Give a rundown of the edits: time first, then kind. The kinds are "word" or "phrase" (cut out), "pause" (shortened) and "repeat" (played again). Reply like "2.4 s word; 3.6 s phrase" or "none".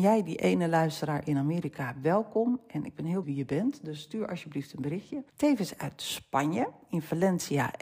3.2 s word; 5.3 s pause

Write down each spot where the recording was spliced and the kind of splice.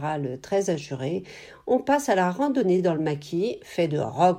none

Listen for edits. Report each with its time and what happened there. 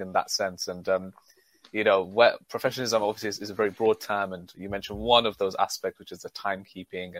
none

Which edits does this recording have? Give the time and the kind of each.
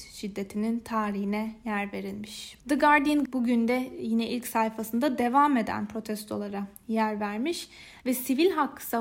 2.6 s pause; 3.2 s word

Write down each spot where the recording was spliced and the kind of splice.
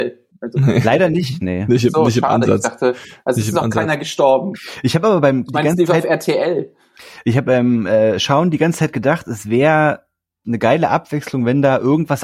5.5 s word; 7.4 s word; 10.4 s word

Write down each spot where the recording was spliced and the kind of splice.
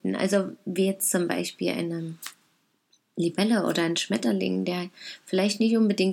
2.9 s pause

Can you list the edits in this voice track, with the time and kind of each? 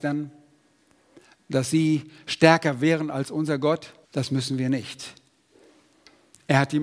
4.0 s pause

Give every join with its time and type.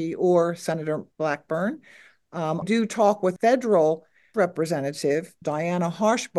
1.1 s pause; 2.6 s word; 3.4 s word; 4.3 s word; 5.4 s word

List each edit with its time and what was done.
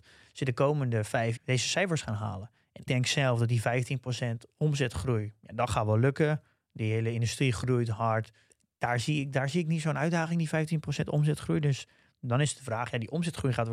1.4 s word; 2.9 s word

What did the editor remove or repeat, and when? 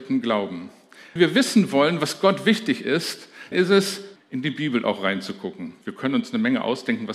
1.2 s word; 3.5 s word; 4.2 s word

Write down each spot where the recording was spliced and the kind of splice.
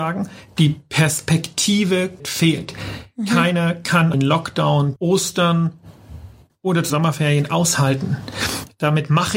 2.2 s word; 4.1 s word; 5.0 s word; 6.5 s word; 6.9 s word

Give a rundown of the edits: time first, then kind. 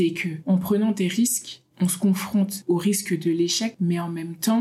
1.7 s pause

